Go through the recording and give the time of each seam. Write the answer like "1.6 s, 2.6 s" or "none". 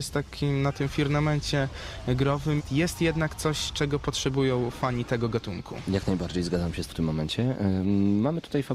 2.6 s, 6.9 s